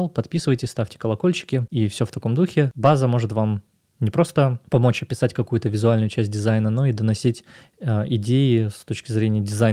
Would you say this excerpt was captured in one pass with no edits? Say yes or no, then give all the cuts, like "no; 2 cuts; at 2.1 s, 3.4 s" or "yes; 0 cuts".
yes; 0 cuts